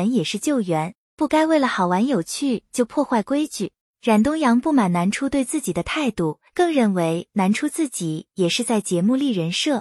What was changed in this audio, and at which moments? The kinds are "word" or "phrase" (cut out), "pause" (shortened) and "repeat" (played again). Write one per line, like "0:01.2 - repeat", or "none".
0:03.8 - pause
0:06.5 - pause